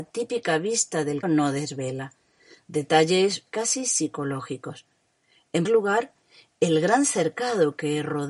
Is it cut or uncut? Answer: cut